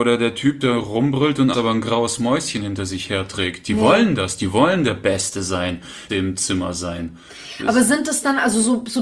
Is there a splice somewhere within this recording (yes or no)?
yes